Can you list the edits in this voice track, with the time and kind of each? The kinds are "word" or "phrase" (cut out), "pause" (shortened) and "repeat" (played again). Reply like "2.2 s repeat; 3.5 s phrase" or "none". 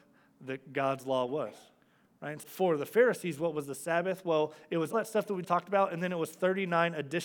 2.4 s word; 4.9 s word; 5.4 s word

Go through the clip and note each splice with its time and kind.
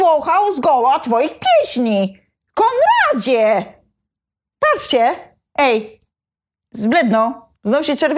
none

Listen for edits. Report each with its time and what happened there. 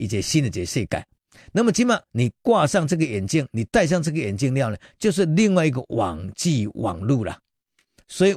2.1 s pause

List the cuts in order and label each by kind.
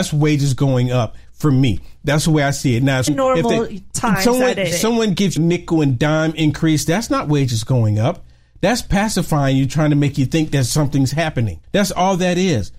3.1 s word; 4.7 s word; 5.4 s word; 11.6 s pause

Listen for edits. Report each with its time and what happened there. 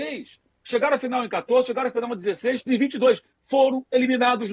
2.7 s word

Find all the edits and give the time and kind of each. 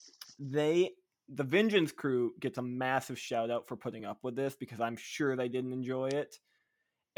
none

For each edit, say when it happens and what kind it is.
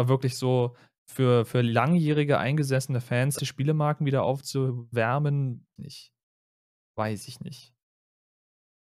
3.4 s word; 5.8 s phrase

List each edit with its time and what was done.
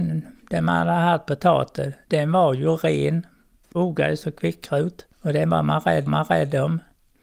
2.0 s pause; 3.7 s word; 5.1 s pause; 6.1 s repeat

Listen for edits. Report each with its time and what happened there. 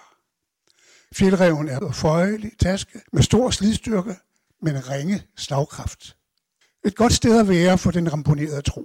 1.8 s word; 3.1 s pause; 6.6 s pause

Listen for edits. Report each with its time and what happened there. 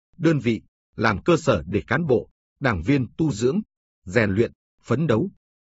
none

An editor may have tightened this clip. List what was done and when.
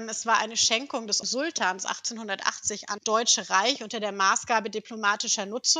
1.2 s word; 3.0 s word

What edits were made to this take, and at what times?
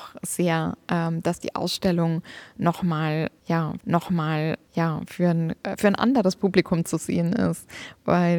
3.8 s repeat

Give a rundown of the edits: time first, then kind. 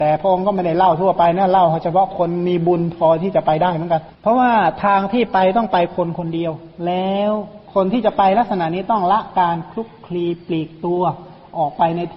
4.1 s pause; 7.6 s pause

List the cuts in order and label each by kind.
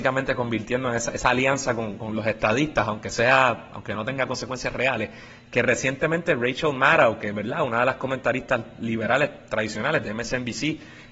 none

